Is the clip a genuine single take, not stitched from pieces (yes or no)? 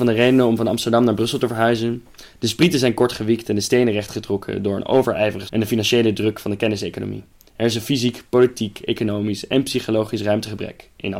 no